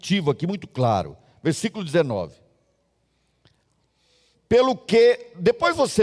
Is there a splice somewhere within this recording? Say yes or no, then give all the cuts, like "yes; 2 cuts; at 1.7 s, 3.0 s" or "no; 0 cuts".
no; 0 cuts